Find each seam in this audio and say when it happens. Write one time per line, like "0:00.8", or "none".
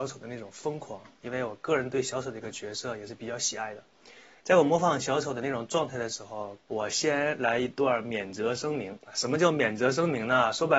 0:06.6